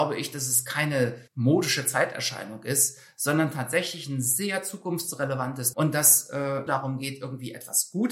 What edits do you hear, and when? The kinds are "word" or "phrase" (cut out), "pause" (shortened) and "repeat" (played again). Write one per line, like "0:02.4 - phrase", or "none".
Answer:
0:01.3 - pause
0:05.7 - word
0:06.7 - phrase